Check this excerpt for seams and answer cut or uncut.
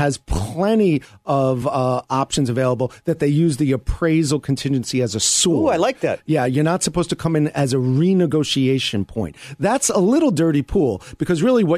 uncut